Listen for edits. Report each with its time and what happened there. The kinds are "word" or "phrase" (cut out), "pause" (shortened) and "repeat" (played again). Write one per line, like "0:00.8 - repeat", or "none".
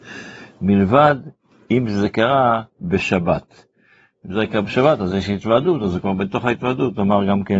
none